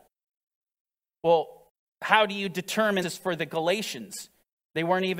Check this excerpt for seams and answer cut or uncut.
cut